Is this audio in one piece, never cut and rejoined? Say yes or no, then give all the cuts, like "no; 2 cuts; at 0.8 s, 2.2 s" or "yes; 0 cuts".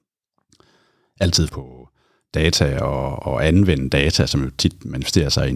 no; 1 cut; at 1.5 s